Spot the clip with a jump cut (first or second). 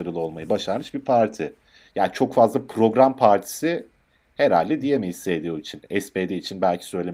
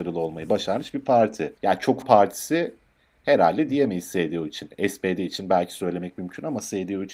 second